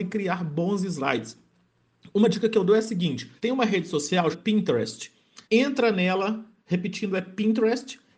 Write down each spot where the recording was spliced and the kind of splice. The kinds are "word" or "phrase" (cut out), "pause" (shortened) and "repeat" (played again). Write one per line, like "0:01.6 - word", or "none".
0:03.4 - pause
0:04.3 - word
0:05.4 - pause